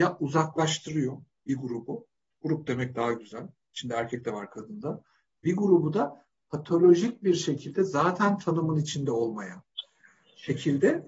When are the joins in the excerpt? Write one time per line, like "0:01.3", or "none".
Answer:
none